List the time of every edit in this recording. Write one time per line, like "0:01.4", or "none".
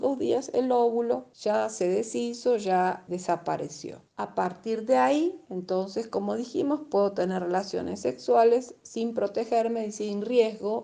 none